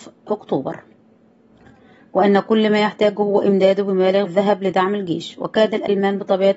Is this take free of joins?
no; 1 cut; at 4.3 s

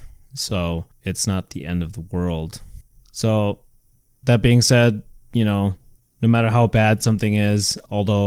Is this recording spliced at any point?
no; 0 cuts

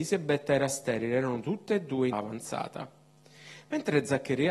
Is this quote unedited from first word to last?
no; 1 cut; at 2.1 s

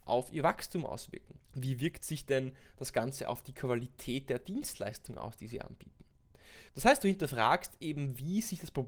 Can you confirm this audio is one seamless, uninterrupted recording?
no; 2 cuts; at 1.4 s, 6.7 s

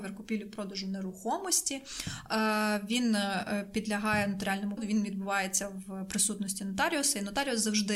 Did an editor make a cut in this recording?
yes; 1 cut; at 4.8 s

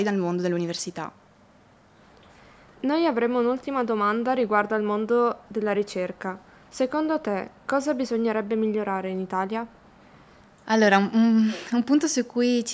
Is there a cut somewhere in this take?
no; 0 cuts

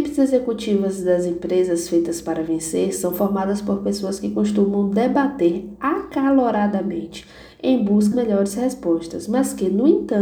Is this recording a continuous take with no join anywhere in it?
no; 1 cut; at 8.1 s

